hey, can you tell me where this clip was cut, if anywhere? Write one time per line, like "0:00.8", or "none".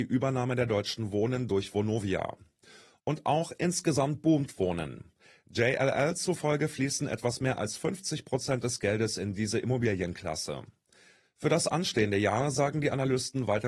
none